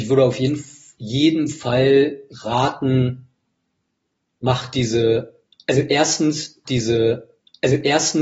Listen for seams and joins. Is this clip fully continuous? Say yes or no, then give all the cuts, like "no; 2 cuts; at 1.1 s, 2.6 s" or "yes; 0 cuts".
no; 1 cut; at 6.7 s